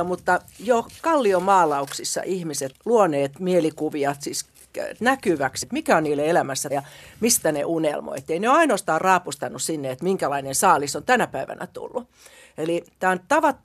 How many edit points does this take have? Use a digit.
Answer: 4